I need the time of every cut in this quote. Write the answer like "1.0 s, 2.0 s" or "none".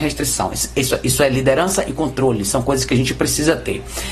none